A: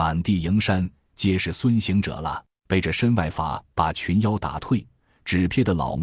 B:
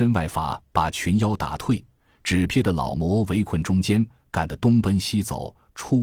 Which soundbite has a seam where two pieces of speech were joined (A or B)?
A